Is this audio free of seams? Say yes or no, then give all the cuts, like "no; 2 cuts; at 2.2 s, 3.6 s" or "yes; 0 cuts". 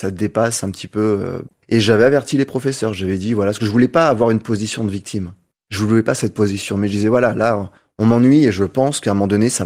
yes; 0 cuts